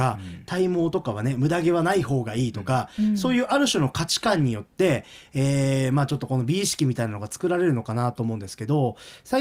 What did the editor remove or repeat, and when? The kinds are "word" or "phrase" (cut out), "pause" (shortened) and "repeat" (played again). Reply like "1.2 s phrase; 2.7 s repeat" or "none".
none